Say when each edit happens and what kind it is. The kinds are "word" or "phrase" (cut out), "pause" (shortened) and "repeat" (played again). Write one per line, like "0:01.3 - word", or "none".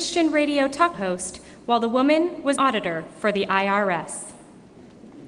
0:00.9 - word
0:02.6 - word